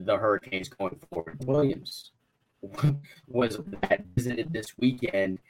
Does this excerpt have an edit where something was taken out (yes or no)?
yes